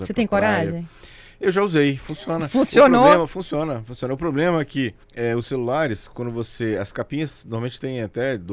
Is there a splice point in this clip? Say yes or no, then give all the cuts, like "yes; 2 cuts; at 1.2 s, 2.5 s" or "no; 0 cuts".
yes; 1 cut; at 5.0 s